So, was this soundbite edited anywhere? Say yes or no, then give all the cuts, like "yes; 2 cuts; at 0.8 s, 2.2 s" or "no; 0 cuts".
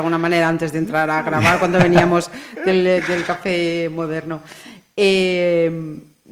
no; 0 cuts